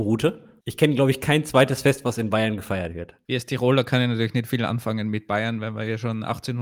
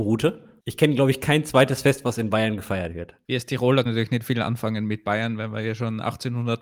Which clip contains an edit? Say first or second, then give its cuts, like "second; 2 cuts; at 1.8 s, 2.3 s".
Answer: second; 1 cut; at 3.9 s